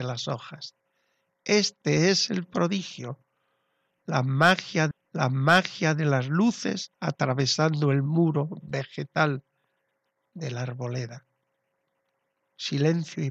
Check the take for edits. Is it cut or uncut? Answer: cut